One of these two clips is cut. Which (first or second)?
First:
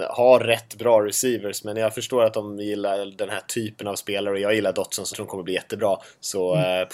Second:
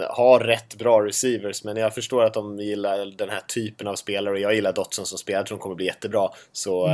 first